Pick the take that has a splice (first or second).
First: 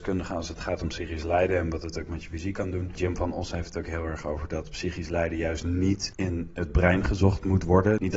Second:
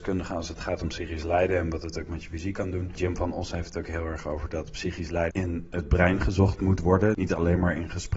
second